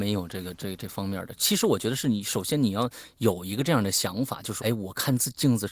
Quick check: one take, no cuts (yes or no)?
no